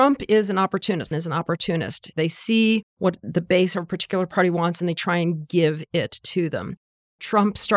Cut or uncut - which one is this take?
cut